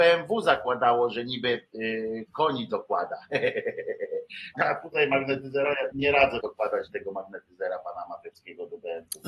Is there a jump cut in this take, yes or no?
yes